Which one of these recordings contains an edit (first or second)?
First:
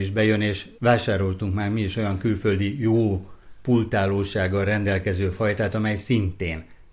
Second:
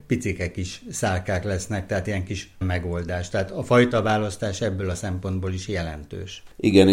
second